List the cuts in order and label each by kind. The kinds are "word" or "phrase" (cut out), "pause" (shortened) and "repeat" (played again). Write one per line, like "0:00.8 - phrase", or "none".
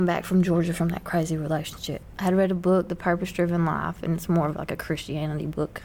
none